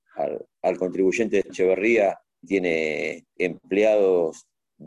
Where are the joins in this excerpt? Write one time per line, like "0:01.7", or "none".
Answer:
0:01.5
0:02.4
0:03.4